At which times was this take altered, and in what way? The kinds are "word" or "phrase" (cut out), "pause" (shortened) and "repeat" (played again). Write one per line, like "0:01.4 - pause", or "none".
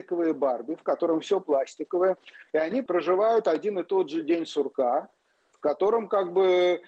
none